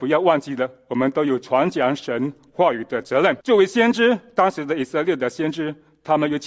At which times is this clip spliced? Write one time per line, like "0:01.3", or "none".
0:03.4